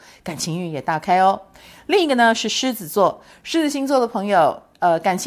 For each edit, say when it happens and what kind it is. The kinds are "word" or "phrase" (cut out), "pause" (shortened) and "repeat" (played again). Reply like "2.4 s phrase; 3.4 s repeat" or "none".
none